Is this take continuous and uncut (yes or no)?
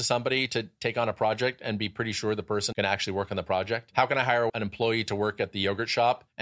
no